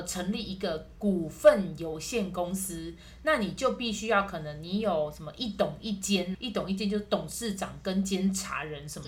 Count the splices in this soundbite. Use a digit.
1